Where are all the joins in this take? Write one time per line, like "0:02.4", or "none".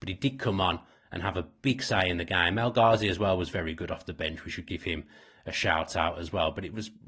none